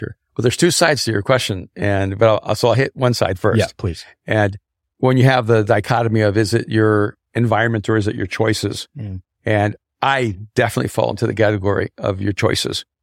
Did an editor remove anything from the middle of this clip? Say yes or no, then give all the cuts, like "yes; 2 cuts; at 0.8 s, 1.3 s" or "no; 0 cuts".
no; 0 cuts